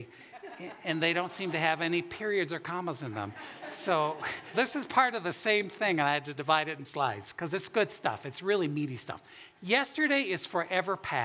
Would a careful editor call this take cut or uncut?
cut